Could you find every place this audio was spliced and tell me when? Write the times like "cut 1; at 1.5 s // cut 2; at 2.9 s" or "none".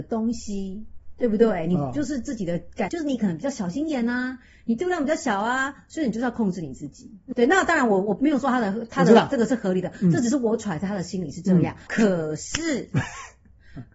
cut 1; at 2.9 s // cut 2; at 7.3 s // cut 3; at 11.9 s